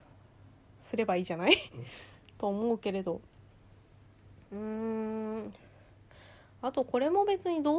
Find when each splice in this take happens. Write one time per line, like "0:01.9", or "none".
none